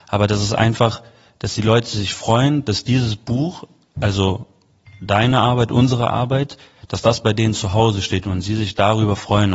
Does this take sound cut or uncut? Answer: uncut